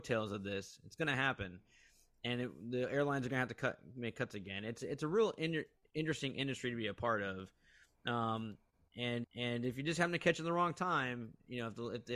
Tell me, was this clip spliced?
yes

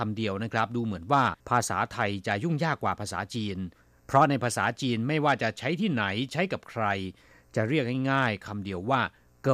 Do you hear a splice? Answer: yes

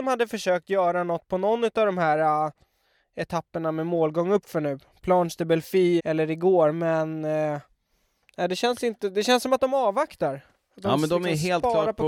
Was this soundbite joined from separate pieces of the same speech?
yes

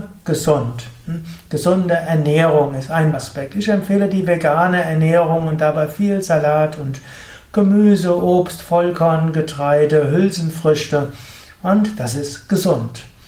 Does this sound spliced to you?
yes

